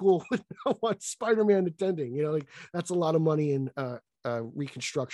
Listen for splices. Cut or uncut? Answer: uncut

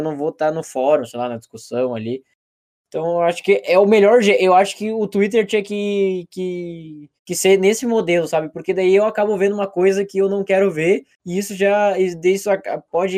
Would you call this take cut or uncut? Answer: cut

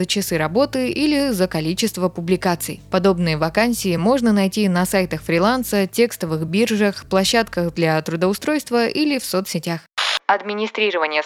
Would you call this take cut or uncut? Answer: uncut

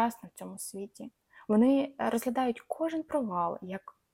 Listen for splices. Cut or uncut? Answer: uncut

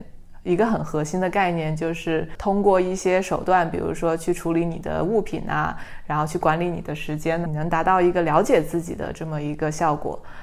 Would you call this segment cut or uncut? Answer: cut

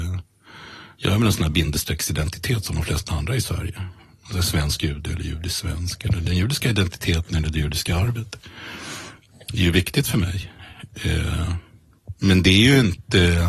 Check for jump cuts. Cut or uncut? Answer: uncut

